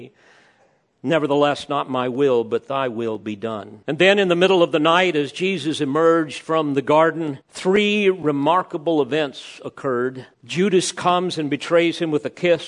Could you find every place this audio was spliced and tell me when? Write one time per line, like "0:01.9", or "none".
0:03.8
0:07.4
0:10.3